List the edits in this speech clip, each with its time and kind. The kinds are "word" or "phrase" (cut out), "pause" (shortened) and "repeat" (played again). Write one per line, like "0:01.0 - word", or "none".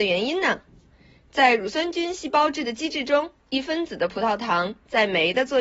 0:03.4 - pause